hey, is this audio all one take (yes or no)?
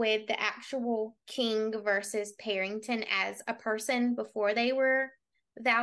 no